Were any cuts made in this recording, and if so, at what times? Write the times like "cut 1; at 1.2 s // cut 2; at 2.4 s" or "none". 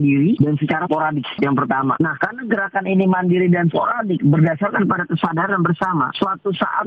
none